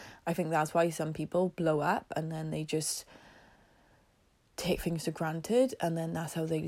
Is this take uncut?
yes; 0 cuts

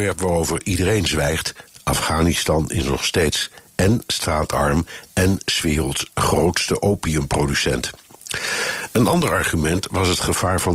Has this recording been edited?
no; 0 cuts

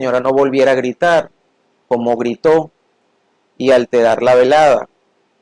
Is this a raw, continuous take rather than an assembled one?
yes; 0 cuts

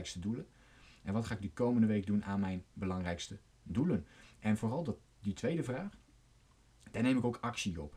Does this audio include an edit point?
no; 0 cuts

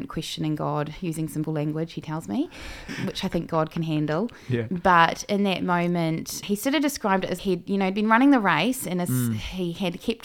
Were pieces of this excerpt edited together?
yes; 4 cuts; at 1.5 s, 2.9 s, 6.4 s, 7.4 s

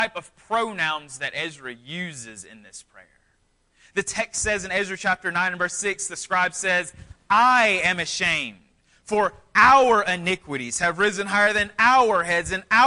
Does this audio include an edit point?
no; 0 cuts

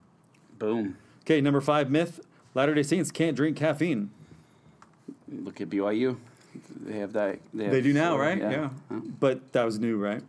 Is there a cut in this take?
no; 0 cuts

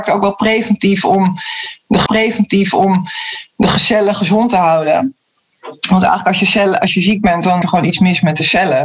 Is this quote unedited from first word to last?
no; 2 cuts; at 2.1 s, 7.6 s

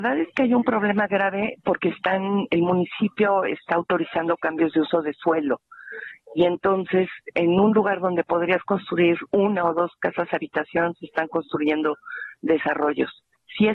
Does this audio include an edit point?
no; 0 cuts

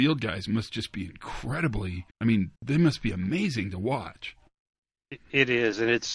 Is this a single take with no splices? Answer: no; 2 cuts; at 2.1 s, 2.6 s

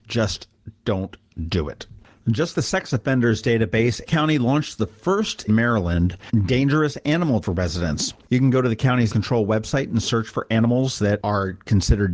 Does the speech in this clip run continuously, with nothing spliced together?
no; 5 cuts; at 2.5 s, 4.1 s, 5.5 s, 7.4 s, 9.1 s

